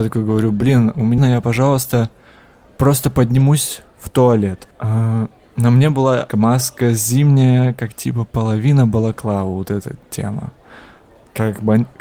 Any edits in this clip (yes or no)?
yes